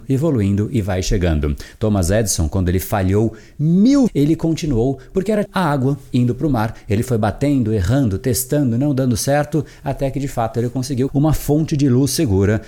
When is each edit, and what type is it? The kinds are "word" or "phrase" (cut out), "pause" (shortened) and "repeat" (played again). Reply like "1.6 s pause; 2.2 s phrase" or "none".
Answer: 4.1 s word; 5.5 s word; 11.1 s word